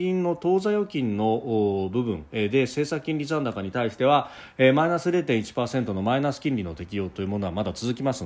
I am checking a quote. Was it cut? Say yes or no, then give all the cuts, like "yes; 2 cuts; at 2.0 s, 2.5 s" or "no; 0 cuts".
no; 0 cuts